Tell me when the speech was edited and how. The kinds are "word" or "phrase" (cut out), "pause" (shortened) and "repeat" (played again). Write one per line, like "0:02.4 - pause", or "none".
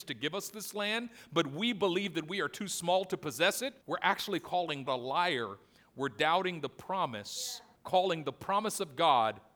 0:03.8 - pause
0:04.9 - word
0:07.8 - pause